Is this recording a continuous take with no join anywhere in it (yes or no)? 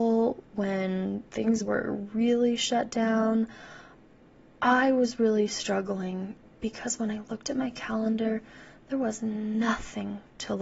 yes